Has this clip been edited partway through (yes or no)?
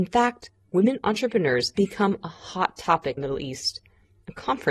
yes